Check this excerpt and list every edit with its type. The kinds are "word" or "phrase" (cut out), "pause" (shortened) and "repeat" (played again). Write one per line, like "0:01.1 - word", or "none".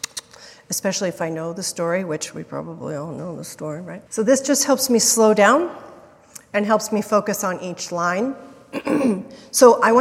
0:04.1 - pause